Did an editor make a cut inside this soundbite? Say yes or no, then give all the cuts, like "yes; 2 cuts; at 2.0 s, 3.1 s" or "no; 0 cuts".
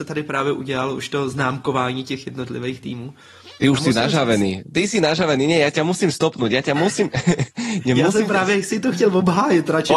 no; 0 cuts